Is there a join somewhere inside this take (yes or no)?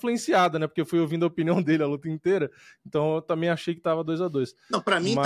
no